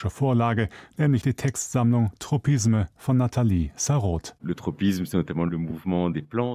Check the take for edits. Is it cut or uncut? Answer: cut